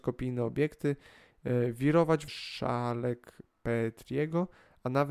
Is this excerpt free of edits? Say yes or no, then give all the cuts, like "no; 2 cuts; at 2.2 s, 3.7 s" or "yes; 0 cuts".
no; 1 cut; at 2.3 s